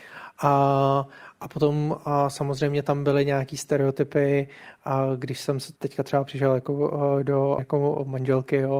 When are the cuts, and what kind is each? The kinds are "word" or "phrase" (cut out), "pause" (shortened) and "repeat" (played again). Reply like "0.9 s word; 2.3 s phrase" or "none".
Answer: 5.8 s pause; 7.6 s word